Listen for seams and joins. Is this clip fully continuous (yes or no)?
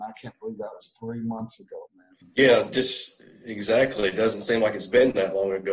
no